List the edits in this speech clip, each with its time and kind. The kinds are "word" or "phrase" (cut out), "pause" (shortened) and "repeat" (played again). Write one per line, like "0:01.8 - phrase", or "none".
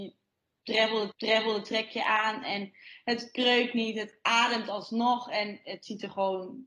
0:01.1 - repeat